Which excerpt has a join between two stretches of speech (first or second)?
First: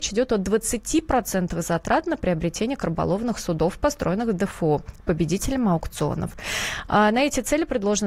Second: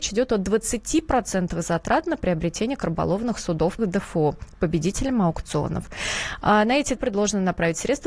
second